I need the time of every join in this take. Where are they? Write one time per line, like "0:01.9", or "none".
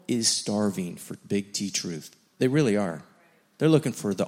none